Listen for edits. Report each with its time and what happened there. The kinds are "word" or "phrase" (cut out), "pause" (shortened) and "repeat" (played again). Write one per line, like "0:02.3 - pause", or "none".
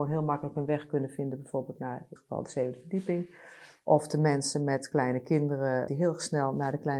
0:02.2 - word
0:05.9 - word